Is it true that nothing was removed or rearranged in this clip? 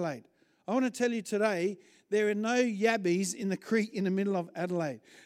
yes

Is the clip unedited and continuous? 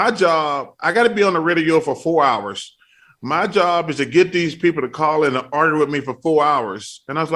yes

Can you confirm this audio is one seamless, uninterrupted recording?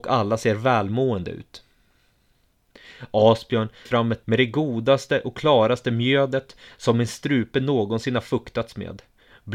no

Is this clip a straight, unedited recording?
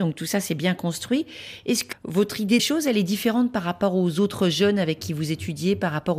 no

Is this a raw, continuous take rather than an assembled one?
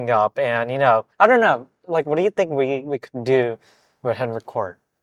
no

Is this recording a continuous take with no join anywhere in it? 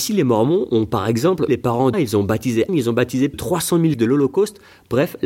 no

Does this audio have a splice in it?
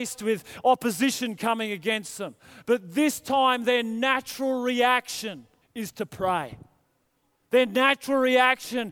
yes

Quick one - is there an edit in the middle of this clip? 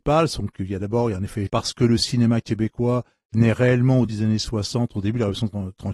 yes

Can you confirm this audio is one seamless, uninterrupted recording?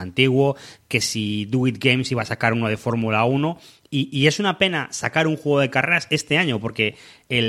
yes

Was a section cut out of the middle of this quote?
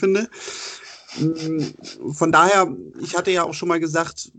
no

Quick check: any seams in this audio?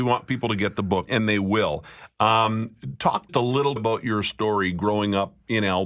yes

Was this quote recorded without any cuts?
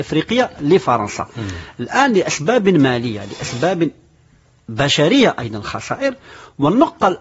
yes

